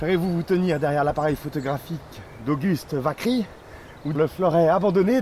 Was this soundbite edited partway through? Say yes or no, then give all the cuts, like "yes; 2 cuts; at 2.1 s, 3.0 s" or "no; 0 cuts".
yes; 1 cut; at 4.1 s